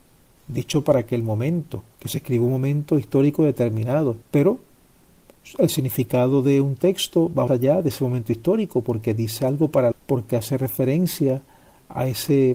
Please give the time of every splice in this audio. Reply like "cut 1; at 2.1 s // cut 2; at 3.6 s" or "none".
cut 1; at 1.9 s // cut 2; at 4.2 s // cut 3; at 7.5 s // cut 4; at 9.9 s

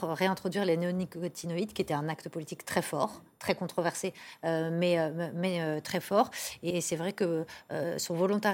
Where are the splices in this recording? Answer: cut 1; at 6.7 s

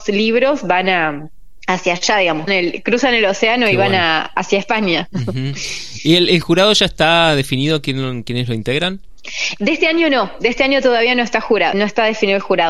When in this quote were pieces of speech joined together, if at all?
cut 1; at 2.5 s // cut 2; at 11.7 s

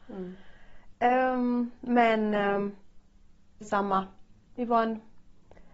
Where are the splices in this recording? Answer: cut 1; at 3.6 s

